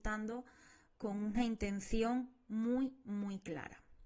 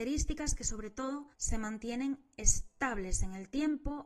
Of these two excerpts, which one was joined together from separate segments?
second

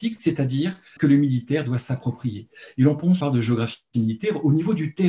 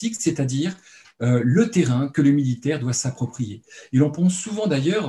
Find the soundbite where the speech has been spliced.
first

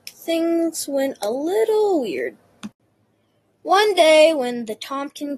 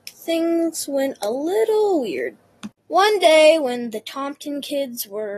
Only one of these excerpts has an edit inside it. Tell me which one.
second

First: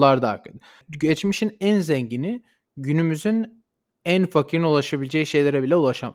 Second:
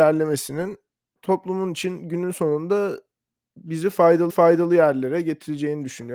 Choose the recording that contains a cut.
second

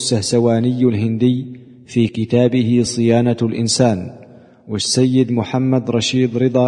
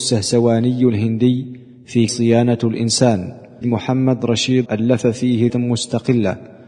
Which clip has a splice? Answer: second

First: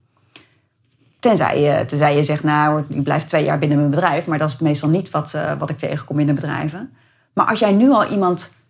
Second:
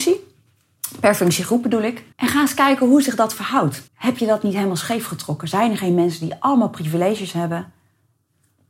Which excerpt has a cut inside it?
second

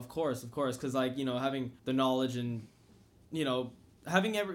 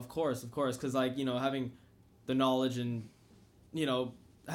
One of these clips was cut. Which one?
first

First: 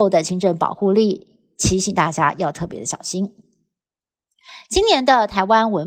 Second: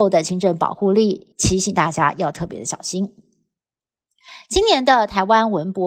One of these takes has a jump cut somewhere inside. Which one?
second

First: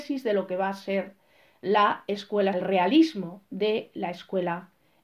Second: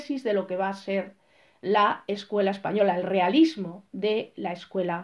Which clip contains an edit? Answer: first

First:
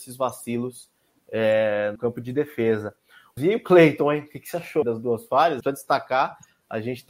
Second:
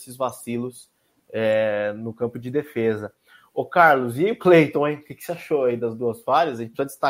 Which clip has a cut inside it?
first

